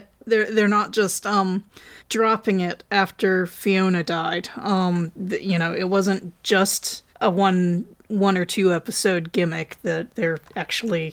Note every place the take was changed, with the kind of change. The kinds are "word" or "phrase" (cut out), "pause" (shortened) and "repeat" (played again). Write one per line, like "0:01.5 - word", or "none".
0:02.0 - pause
0:07.1 - pause